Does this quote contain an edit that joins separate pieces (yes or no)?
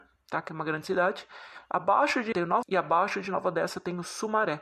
yes